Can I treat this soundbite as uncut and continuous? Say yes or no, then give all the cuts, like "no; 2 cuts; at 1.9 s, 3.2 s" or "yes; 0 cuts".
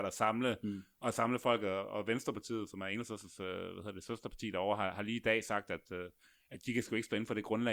yes; 0 cuts